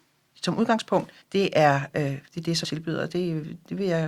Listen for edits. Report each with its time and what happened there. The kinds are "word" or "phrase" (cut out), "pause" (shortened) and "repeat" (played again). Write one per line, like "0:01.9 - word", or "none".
0:01.2 - pause
0:02.3 - pause
0:02.6 - word